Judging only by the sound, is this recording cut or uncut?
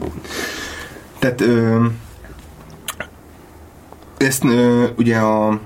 uncut